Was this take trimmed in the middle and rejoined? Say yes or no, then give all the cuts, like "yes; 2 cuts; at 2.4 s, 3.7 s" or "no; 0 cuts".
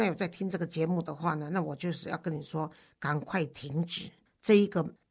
no; 0 cuts